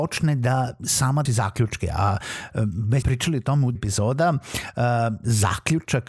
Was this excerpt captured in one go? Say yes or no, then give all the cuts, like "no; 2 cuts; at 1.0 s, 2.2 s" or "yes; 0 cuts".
no; 3 cuts; at 1.3 s, 3.0 s, 3.8 s